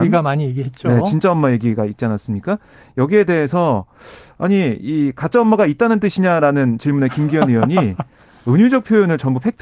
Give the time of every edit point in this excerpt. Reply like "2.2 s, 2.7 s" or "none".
none